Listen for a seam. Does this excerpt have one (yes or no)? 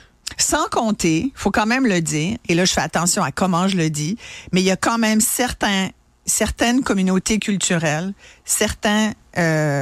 no